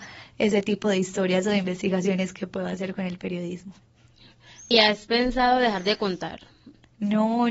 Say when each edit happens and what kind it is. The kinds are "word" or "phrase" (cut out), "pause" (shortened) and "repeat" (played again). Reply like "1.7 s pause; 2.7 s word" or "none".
none